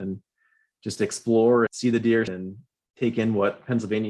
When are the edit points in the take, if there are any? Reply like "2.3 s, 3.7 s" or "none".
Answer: 1.7 s, 2.3 s